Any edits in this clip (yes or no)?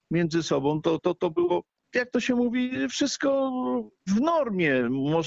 yes